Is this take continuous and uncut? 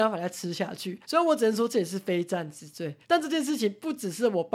no; 2 cuts; at 1.0 s, 3.0 s

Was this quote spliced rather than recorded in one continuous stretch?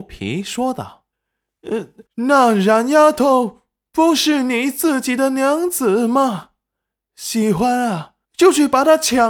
yes; 3 cuts; at 1.1 s, 2.1 s, 8.2 s

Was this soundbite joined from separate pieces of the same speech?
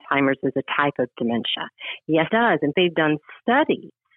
yes; 2 cuts; at 2.3 s, 2.7 s

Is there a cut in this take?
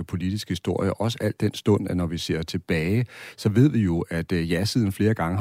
no; 0 cuts

